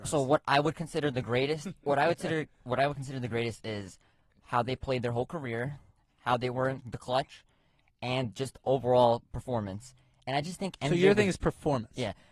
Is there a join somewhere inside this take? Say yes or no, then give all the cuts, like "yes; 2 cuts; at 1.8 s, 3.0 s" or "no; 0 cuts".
no; 0 cuts